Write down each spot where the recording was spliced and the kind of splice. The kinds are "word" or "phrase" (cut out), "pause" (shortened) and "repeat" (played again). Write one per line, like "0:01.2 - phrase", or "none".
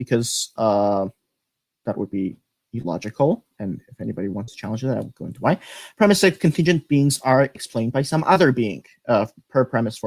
none